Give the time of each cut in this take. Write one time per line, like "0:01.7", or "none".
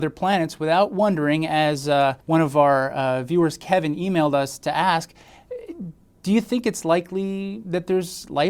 0:02.2